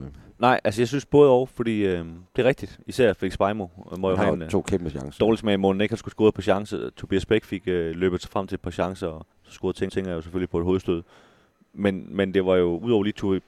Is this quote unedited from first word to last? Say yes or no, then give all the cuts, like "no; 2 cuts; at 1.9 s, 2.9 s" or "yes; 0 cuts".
no; 3 cuts; at 2.3 s, 9.3 s, 9.9 s